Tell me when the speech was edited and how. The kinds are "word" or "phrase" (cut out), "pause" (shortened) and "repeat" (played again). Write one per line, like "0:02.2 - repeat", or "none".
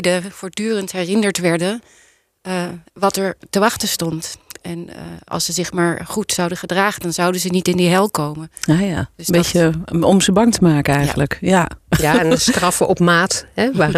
none